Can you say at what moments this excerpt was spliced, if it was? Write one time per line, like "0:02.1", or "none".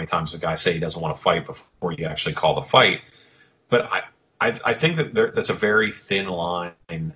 none